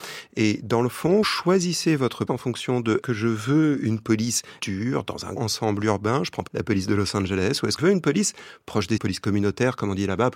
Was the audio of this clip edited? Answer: yes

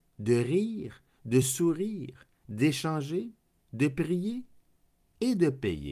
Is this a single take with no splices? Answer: yes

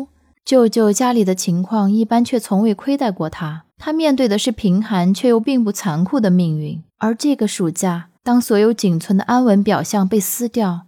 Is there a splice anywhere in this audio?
yes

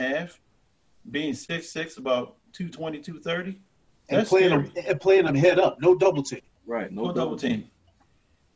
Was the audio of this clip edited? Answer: no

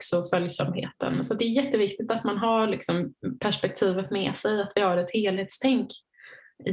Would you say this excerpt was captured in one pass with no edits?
yes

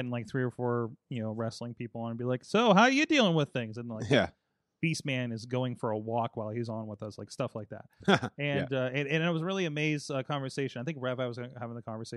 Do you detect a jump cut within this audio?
no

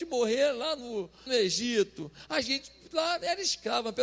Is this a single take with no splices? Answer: no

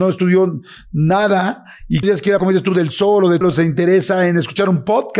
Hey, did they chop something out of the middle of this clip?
yes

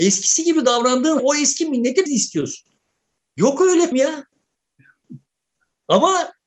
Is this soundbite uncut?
no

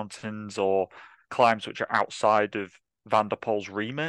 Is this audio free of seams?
yes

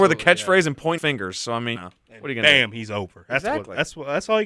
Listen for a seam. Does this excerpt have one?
yes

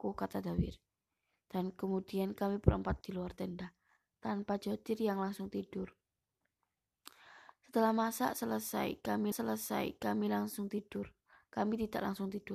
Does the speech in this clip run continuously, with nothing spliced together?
no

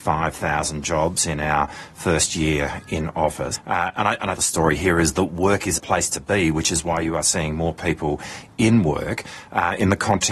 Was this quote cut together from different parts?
yes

